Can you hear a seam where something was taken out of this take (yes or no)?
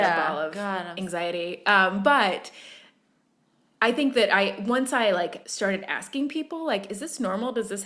yes